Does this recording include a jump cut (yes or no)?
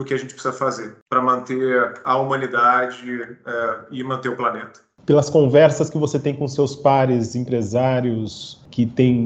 no